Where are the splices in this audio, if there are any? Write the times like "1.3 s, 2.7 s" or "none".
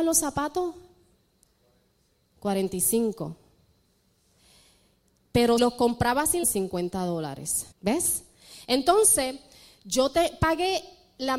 5.6 s, 6.4 s, 7.7 s